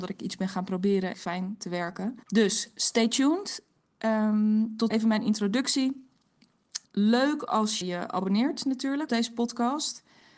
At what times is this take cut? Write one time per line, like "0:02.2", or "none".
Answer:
0:01.1
0:02.2
0:04.9
0:06.8
0:07.8
0:09.1